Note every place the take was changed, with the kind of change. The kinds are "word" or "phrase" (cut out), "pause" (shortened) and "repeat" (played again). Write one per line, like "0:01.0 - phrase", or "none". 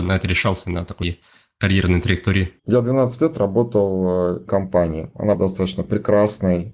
0:01.0 - phrase
0:02.6 - pause
0:04.5 - phrase
0:05.3 - word